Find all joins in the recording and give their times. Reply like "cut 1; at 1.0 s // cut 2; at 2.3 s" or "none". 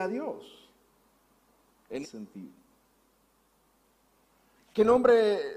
cut 1; at 2.0 s